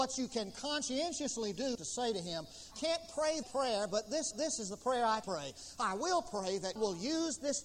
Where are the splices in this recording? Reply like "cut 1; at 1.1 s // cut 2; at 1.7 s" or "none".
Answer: cut 1; at 1.7 s // cut 2; at 2.7 s // cut 3; at 3.4 s // cut 4; at 4.3 s // cut 5; at 5.2 s // cut 6; at 6.8 s